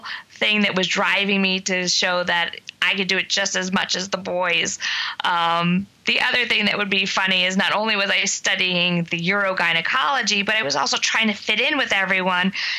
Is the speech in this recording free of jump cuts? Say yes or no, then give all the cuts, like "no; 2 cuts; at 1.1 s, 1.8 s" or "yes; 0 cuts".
no; 1 cut; at 2.8 s